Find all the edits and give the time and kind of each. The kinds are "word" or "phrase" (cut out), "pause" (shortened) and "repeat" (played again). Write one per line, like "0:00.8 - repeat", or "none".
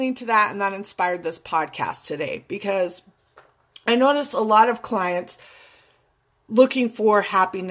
none